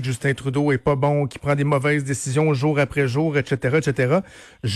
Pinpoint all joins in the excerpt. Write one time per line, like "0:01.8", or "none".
none